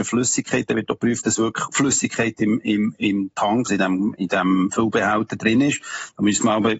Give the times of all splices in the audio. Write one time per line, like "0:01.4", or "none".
0:03.7